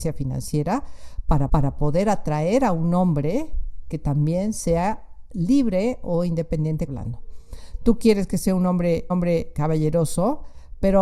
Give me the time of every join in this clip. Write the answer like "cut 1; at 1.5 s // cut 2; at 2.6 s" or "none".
cut 1; at 1.5 s // cut 2; at 6.9 s // cut 3; at 9.1 s